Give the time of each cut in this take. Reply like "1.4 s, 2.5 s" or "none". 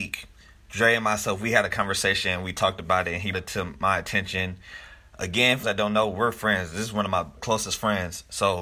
3.3 s, 5.6 s, 7.4 s